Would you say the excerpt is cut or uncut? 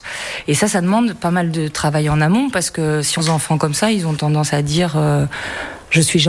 cut